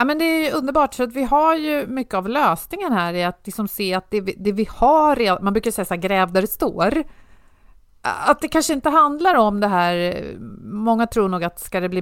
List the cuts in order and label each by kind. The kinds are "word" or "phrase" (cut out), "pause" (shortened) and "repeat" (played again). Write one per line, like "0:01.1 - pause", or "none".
none